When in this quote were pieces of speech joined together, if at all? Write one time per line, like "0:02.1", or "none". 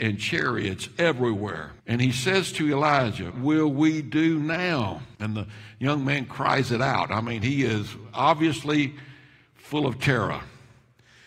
0:01.8
0:03.3
0:05.1